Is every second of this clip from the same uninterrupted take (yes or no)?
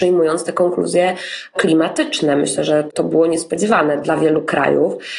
yes